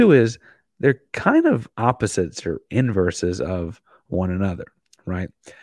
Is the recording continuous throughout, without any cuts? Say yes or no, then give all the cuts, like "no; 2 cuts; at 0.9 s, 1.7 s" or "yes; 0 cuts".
no; 1 cut; at 1.7 s